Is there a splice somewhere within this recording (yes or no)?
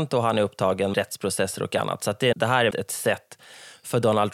yes